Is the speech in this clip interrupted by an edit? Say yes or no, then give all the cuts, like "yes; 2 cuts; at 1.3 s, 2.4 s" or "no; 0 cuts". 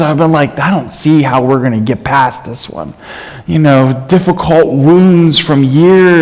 no; 0 cuts